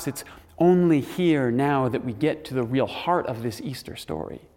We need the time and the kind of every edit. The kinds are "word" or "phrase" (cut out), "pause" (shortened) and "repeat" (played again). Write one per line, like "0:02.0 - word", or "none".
none